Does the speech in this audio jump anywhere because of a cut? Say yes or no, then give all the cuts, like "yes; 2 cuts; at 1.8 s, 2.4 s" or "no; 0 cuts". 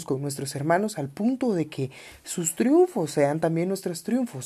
no; 0 cuts